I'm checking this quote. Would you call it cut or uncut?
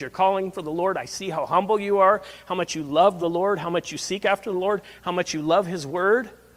uncut